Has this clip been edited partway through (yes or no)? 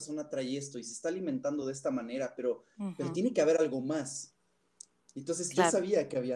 no